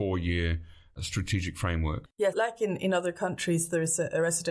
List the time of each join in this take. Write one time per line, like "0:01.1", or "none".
0:02.3